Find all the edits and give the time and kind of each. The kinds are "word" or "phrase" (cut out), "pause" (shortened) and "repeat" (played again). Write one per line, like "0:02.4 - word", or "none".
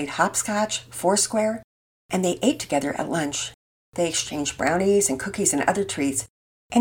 none